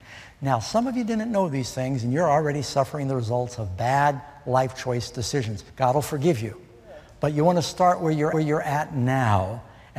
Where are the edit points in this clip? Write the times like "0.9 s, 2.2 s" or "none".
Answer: 5.7 s, 8.3 s